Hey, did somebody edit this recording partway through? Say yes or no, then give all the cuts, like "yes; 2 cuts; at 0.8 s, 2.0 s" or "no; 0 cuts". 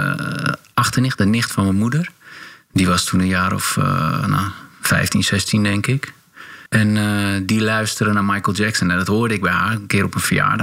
yes; 1 cut; at 6.7 s